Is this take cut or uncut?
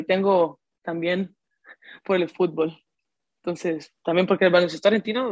uncut